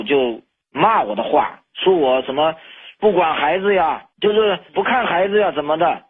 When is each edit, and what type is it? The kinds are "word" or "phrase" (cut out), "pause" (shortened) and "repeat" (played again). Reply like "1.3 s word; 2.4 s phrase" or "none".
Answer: 4.1 s pause; 4.7 s pause